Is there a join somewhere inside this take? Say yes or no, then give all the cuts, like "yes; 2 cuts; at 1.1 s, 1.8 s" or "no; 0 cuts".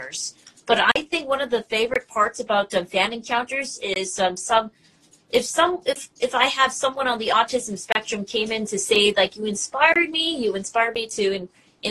no; 0 cuts